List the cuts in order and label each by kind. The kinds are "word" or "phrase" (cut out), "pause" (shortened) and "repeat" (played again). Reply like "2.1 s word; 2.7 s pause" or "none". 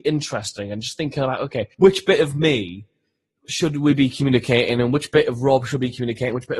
1.7 s pause